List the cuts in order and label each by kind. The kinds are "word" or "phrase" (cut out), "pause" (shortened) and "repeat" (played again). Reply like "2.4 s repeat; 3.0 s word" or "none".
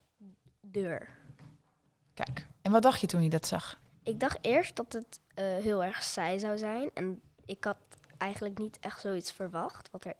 none